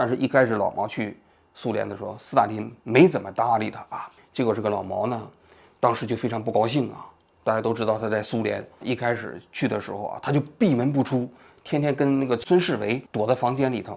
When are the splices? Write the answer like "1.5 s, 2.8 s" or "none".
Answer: 2.8 s, 4.2 s, 8.8 s, 13.1 s